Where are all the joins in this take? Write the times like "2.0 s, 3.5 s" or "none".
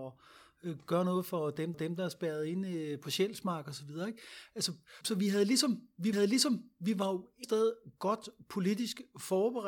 1.7 s, 5.0 s, 6.1 s, 7.4 s